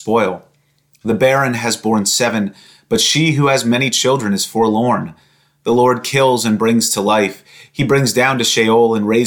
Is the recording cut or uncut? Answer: uncut